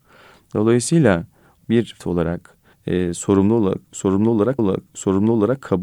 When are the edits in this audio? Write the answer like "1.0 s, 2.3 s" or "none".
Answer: 1.6 s, 2.0 s, 2.7 s, 4.6 s